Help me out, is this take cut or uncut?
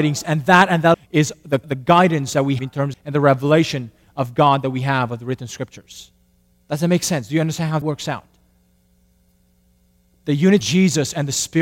cut